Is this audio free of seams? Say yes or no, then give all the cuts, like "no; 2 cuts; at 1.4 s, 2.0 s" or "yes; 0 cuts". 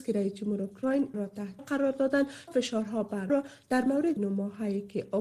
no; 5 cuts; at 1.1 s, 1.6 s, 2.5 s, 3.3 s, 4.2 s